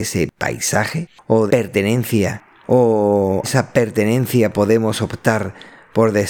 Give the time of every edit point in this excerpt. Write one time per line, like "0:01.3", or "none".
0:01.5
0:03.4